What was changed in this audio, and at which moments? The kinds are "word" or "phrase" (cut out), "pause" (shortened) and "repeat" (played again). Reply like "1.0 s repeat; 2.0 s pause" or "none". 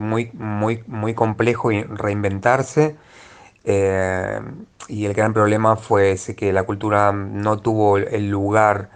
none